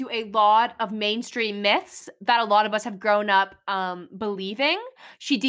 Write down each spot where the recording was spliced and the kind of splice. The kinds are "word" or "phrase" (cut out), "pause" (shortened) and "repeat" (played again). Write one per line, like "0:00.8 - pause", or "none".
none